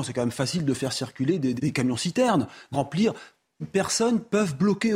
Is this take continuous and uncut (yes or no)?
no